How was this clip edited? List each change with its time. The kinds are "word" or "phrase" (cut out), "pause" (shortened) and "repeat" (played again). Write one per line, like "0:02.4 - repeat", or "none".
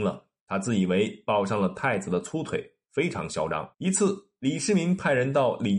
0:03.7 - pause